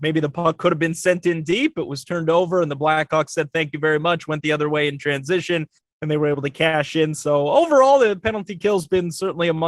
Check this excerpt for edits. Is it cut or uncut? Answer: uncut